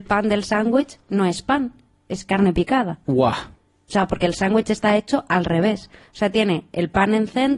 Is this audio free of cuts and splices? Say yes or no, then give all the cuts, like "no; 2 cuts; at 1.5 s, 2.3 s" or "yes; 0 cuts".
yes; 0 cuts